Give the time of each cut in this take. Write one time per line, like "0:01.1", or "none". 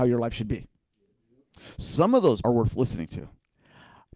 0:02.4